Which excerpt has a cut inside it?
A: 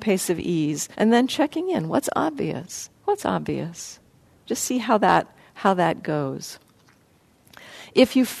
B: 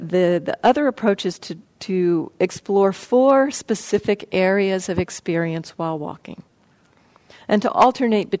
A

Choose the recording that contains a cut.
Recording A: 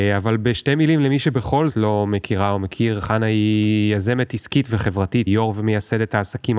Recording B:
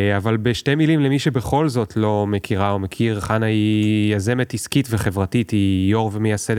A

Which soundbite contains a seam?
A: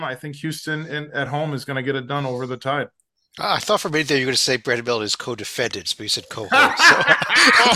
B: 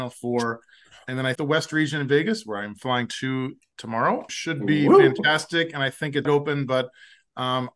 B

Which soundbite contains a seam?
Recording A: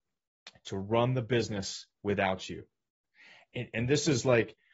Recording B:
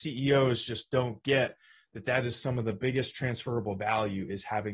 A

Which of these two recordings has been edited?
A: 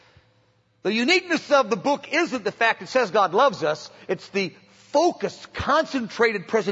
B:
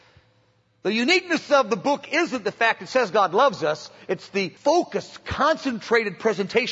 B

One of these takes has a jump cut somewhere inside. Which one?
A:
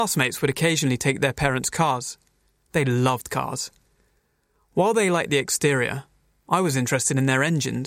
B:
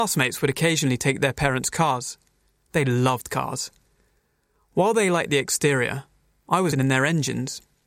B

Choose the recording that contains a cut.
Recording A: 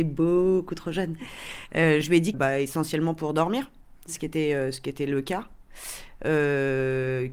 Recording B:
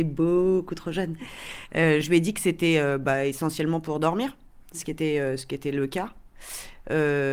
A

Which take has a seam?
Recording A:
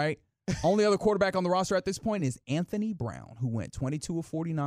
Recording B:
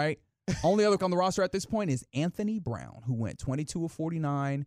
B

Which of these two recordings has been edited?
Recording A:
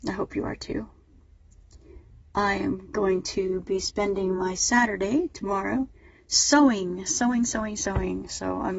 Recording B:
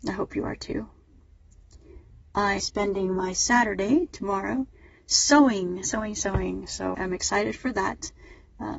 B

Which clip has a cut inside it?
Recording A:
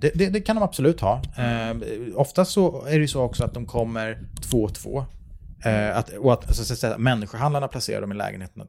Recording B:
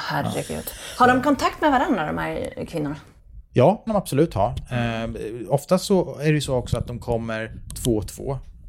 B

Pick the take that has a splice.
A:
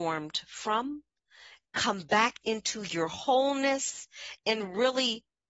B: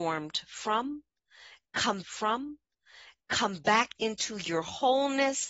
B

